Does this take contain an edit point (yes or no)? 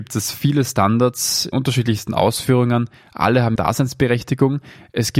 yes